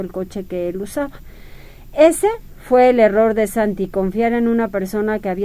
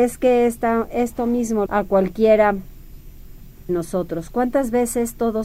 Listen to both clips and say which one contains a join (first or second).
second